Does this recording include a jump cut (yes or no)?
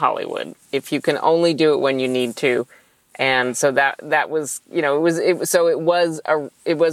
no